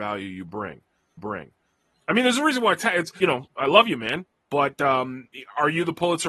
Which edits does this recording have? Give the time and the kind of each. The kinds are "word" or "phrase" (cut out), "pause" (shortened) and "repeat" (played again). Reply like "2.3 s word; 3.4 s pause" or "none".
1.2 s repeat; 3.2 s phrase